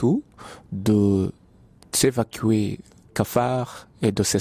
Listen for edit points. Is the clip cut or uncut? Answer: cut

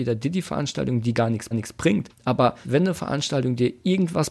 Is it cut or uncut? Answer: cut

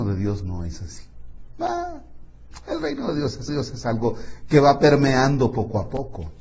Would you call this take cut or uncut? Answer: cut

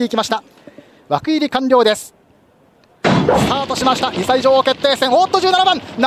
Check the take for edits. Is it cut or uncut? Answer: uncut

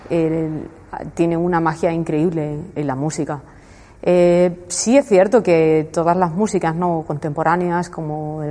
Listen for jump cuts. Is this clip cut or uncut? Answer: cut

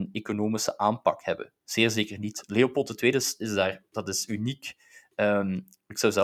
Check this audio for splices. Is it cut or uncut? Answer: uncut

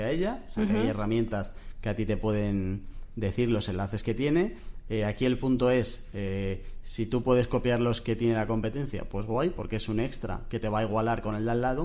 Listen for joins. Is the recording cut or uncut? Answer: uncut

